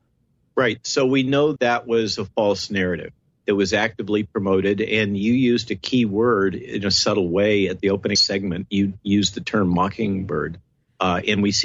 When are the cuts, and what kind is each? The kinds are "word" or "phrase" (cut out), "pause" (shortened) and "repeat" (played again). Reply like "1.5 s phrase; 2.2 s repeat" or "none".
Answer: 1.6 s word; 3.2 s pause; 8.2 s phrase; 10.7 s pause